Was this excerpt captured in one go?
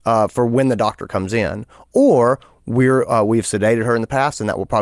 yes; 0 cuts

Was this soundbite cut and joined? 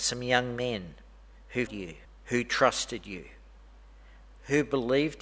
yes; 2 cuts; at 1.7 s, 2.0 s

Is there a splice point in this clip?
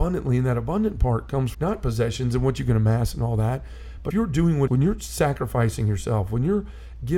yes; 3 cuts; at 1.5 s, 4.1 s, 4.7 s

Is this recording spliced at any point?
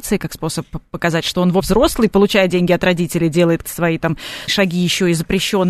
yes; 3 cuts; at 1.6 s, 3.6 s, 4.5 s

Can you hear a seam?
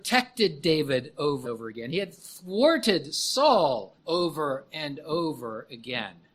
yes; 2 cuts; at 1.4 s, 4.0 s

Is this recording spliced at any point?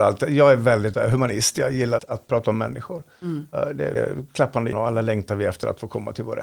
yes; 4 cuts; at 0.9 s, 2.0 s, 4.0 s, 4.7 s

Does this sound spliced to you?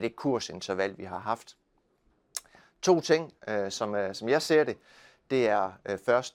no; 0 cuts

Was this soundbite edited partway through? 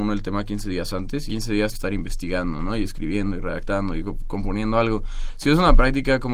yes; 2 cuts; at 1.3 s, 1.7 s

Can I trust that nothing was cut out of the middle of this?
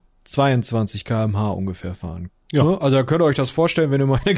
yes; 0 cuts

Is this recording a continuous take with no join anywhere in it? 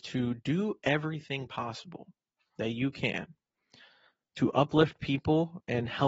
yes; 0 cuts

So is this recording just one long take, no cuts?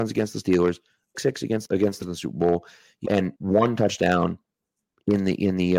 no; 5 cuts; at 1.1 s, 1.6 s, 2.0 s, 3.0 s, 3.4 s

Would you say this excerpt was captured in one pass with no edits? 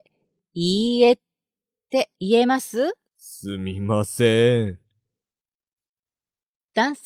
no; 2 cuts; at 2.1 s, 3.1 s

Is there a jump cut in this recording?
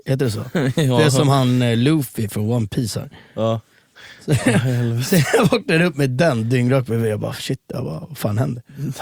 no; 0 cuts

